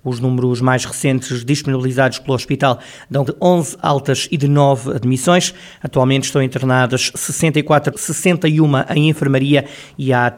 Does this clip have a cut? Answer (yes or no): yes